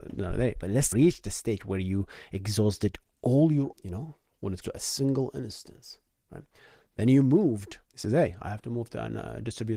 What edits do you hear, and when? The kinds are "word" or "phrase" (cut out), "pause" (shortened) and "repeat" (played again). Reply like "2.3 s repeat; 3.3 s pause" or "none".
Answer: 0.9 s word; 3.7 s word; 4.6 s word; 7.8 s pause